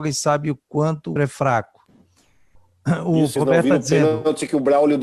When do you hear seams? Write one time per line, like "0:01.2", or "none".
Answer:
0:01.2
0:03.4